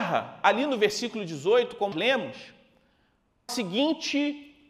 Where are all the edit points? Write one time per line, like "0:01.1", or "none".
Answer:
0:01.9
0:03.5